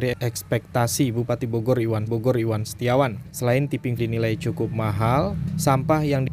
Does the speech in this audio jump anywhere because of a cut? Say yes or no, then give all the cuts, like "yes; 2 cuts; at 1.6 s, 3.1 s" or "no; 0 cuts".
yes; 2 cuts; at 2.1 s, 4.0 s